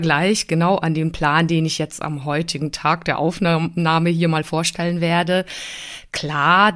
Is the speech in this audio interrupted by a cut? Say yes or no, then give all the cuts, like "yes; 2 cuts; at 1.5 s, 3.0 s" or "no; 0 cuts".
no; 0 cuts